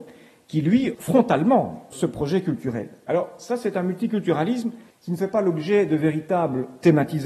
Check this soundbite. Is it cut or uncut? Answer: cut